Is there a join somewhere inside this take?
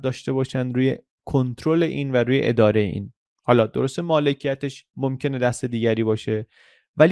no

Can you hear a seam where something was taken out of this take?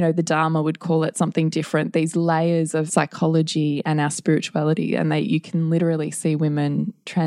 yes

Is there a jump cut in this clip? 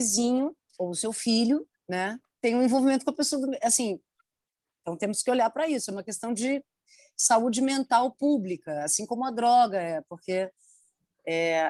no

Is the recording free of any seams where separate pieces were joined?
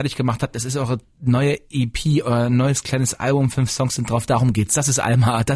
yes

